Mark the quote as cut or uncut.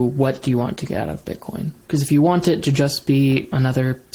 uncut